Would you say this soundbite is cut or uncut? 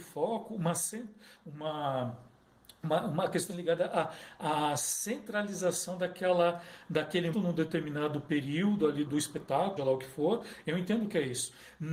cut